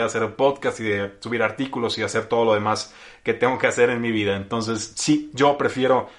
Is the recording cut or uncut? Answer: uncut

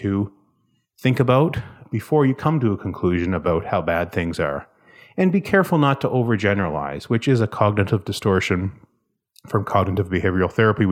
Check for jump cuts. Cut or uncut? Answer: uncut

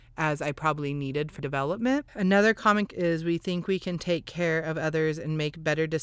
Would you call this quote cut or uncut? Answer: cut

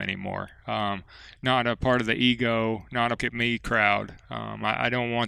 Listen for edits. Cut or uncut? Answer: cut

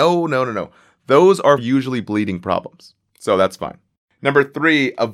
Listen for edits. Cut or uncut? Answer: cut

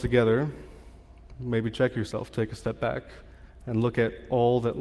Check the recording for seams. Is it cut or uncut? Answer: uncut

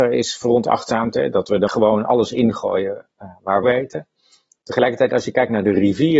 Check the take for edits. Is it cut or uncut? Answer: cut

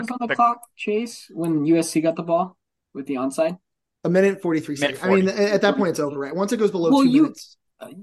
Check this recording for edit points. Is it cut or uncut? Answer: uncut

